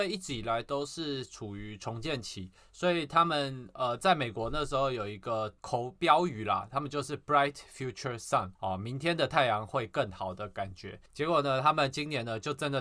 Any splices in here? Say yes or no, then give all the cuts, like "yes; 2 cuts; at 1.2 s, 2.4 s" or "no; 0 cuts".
yes; 3 cuts; at 5.6 s, 8.5 s, 11.1 s